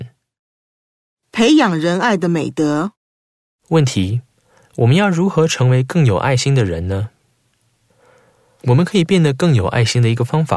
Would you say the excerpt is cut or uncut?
uncut